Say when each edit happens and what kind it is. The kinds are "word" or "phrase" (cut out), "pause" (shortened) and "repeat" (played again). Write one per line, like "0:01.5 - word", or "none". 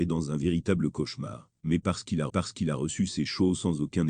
0:01.6 - pause
0:02.3 - repeat